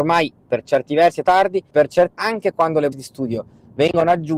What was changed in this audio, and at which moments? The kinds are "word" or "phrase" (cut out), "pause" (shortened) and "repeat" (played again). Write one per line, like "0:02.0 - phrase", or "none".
0:01.2 - word
0:01.7 - word
0:02.1 - word
0:02.9 - word

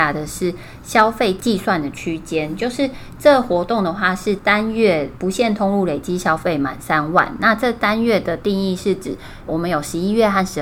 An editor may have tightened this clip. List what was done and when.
0:09.5 - word

